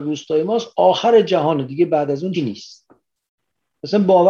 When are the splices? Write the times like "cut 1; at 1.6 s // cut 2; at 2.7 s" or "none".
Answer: cut 1; at 2.3 s